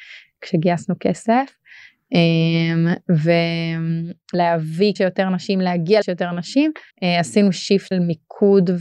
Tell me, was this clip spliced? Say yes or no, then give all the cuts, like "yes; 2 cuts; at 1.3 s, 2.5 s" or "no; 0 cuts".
yes; 5 cuts; at 4.3 s, 5.0 s, 6.0 s, 6.9 s, 7.9 s